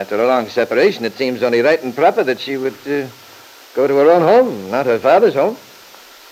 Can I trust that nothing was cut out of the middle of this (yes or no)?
yes